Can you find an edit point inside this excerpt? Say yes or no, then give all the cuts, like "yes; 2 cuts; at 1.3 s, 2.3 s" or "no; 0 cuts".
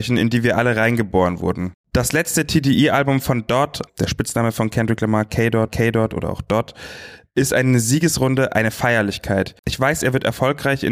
yes; 2 cuts; at 3.9 s, 5.7 s